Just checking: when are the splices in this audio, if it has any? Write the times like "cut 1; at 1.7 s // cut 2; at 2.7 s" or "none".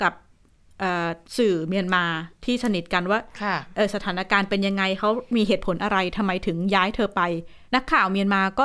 cut 1; at 1.2 s // cut 2; at 2.3 s // cut 3; at 7.7 s